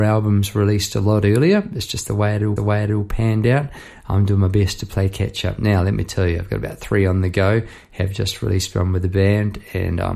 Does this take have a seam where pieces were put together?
yes; 1 cut; at 2.6 s

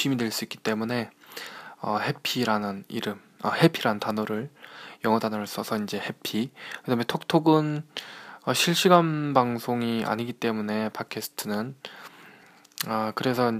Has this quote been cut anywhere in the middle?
no; 0 cuts

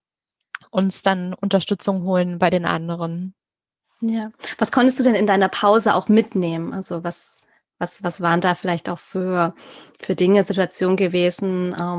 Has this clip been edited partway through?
no; 0 cuts

